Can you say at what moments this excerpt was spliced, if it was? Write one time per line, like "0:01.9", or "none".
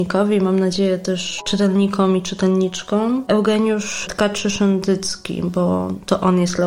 none